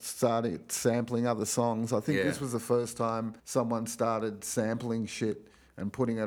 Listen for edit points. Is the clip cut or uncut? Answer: cut